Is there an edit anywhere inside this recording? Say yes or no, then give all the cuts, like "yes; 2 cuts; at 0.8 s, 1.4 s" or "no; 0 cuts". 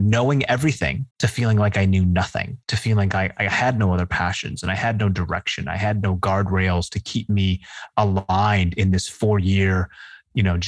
yes; 2 cuts; at 1.1 s, 2.6 s